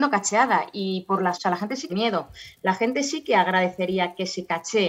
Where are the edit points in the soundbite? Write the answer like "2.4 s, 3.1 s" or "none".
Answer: 1.3 s, 1.9 s